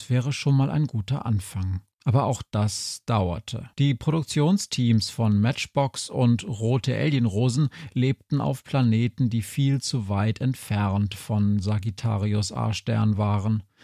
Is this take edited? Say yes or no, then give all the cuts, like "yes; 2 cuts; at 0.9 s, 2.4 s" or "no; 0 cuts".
yes; 2 cuts; at 1.9 s, 3.7 s